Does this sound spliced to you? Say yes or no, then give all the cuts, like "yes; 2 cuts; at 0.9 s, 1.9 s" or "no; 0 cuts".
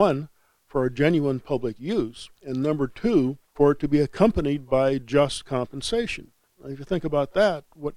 yes; 3 cuts; at 2.4 s, 3.4 s, 6.4 s